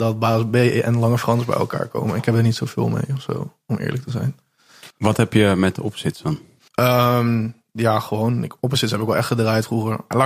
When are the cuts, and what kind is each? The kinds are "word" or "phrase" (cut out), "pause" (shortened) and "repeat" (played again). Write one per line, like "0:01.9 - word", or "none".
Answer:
0:04.9 - pause
0:06.7 - pause